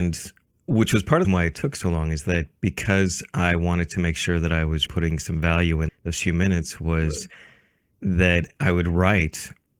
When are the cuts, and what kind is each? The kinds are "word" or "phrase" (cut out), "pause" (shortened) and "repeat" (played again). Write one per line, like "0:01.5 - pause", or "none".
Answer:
0:01.2 - word
0:04.9 - word
0:05.9 - word